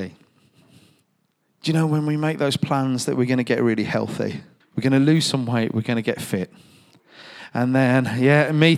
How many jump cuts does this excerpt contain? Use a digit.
1